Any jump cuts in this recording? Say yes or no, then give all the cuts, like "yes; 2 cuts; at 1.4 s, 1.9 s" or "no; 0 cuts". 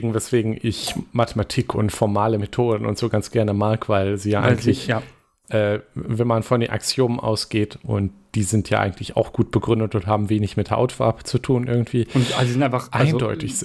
no; 0 cuts